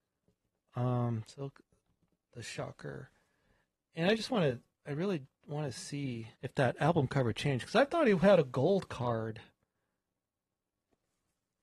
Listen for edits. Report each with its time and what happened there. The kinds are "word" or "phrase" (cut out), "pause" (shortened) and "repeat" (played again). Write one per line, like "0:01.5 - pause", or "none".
0:06.4 - pause